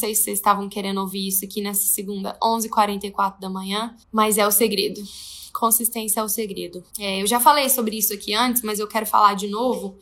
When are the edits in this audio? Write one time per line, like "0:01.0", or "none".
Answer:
0:04.0
0:06.9